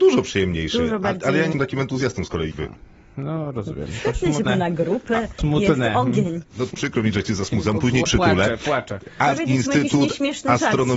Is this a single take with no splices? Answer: no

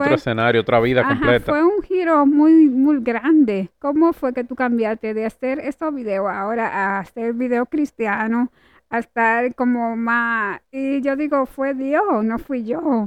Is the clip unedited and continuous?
no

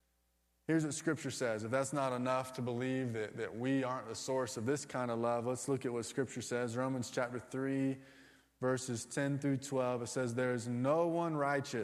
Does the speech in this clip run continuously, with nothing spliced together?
yes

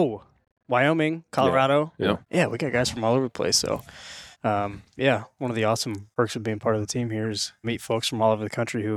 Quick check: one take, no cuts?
no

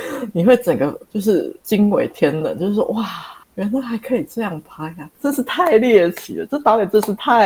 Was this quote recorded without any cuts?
no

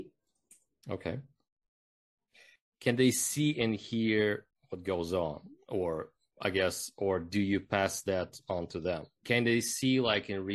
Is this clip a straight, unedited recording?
yes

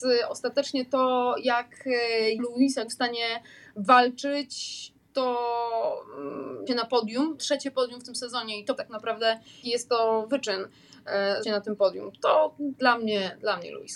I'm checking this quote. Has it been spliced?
yes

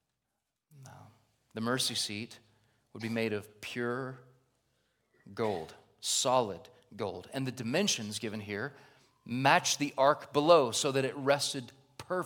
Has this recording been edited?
no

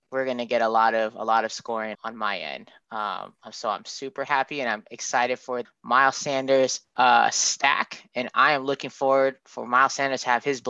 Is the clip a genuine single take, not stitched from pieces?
no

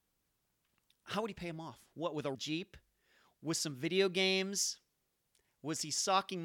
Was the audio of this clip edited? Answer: yes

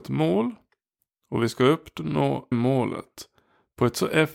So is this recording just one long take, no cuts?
no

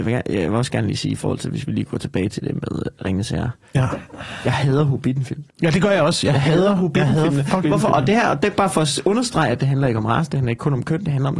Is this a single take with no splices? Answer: no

